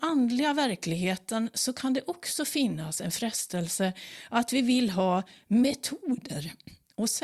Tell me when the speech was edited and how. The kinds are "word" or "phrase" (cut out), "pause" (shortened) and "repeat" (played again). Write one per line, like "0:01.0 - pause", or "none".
none